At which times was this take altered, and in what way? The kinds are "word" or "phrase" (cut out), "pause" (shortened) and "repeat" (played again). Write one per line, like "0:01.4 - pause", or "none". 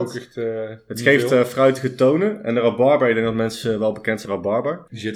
0:04.3 - word